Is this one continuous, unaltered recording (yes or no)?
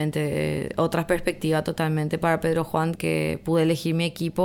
no